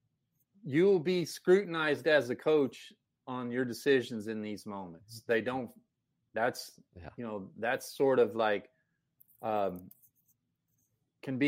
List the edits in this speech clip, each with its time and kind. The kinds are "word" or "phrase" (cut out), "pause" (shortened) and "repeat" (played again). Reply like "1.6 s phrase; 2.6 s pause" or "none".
3.1 s pause; 6.9 s pause